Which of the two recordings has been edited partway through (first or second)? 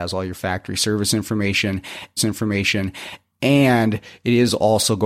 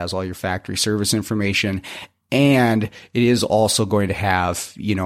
first